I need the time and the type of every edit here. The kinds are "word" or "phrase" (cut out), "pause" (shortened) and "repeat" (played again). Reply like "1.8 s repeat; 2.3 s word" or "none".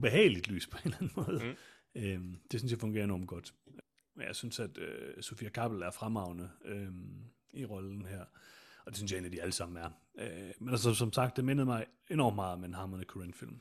none